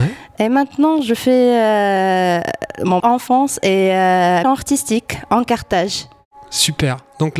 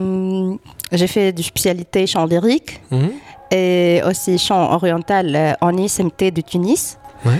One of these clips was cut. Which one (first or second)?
first